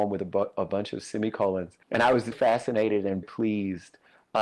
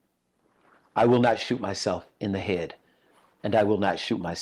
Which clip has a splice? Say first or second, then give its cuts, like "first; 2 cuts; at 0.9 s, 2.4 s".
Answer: first; 3 cuts; at 1.8 s, 2.3 s, 3.2 s